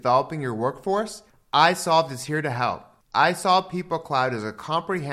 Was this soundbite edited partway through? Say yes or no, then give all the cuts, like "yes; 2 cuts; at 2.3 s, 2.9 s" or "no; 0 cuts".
no; 0 cuts